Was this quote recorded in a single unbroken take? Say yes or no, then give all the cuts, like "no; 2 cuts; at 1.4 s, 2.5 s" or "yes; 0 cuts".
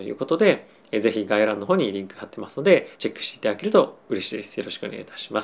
no; 1 cut; at 2.9 s